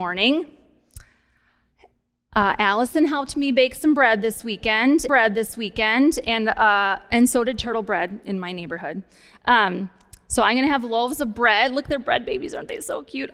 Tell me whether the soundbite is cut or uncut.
cut